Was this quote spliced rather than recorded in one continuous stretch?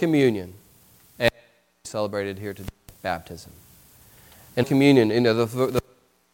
yes; 2 cuts; at 1.8 s, 4.6 s

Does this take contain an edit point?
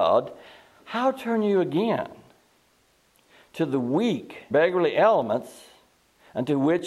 yes; 1 cut; at 4.5 s

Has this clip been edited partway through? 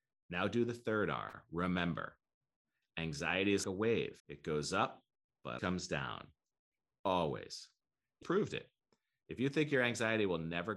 yes; 4 cuts; at 3.6 s, 4.2 s, 5.6 s, 8.2 s

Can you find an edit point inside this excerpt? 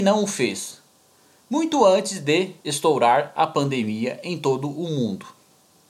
yes; 1 cut; at 2.6 s

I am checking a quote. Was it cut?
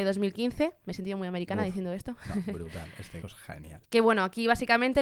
yes; 2 cuts; at 3.2 s, 3.8 s

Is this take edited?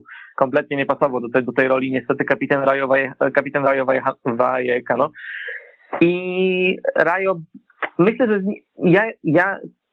no; 0 cuts

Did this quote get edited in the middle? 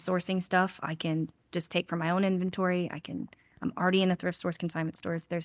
no; 0 cuts

